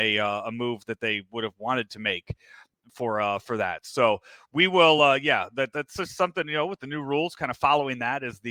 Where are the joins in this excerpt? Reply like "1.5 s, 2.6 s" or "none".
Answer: none